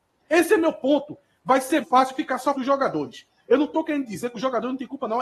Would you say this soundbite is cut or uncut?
cut